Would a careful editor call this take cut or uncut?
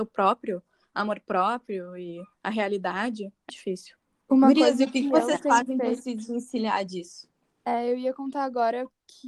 cut